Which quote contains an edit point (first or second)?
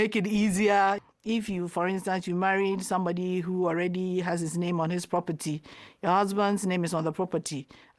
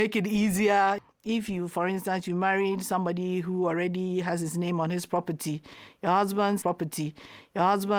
second